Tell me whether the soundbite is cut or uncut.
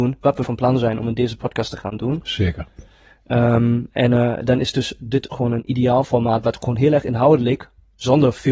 uncut